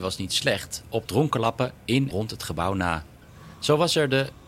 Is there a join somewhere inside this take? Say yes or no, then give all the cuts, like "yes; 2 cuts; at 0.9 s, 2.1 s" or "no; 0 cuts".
yes; 2 cuts; at 1.1 s, 2.1 s